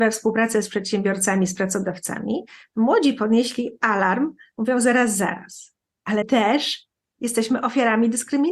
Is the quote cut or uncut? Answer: cut